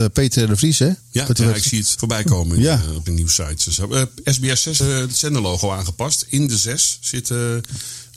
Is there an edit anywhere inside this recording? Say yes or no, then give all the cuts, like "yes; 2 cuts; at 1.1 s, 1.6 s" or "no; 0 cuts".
yes; 5 cuts; at 1.0 s, 1.4 s, 1.9 s, 3.1 s, 4.8 s